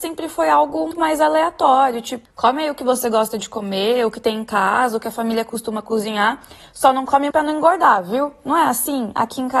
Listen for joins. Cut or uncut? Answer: cut